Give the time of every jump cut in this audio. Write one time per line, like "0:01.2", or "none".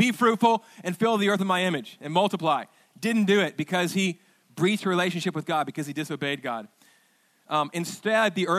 none